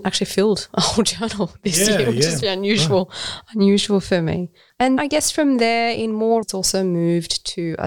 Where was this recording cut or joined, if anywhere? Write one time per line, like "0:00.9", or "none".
0:02.4
0:05.0
0:06.4